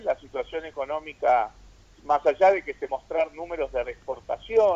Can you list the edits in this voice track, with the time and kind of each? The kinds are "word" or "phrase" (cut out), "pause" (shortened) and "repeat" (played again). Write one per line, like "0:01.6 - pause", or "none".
0:01.9 - word
0:02.9 - word
0:03.8 - word

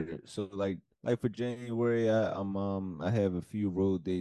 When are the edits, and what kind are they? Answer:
none

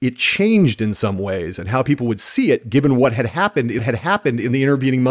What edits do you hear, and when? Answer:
0:03.8 - repeat

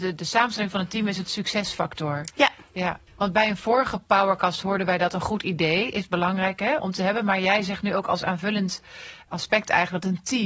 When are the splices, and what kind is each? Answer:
0:03.1 - pause
0:06.8 - word
0:09.3 - word

